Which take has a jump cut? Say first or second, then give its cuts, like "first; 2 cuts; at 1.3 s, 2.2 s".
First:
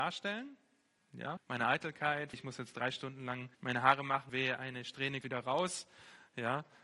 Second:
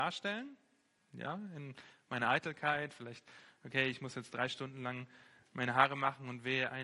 first; 5 cuts; at 1.4 s, 2.3 s, 3.5 s, 4.3 s, 5.2 s